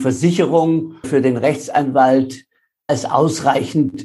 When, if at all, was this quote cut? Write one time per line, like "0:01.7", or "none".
0:01.0
0:02.9